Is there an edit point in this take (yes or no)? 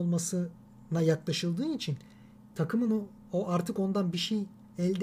no